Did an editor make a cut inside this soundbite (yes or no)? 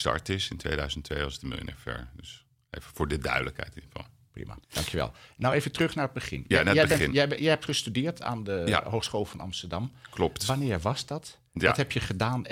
yes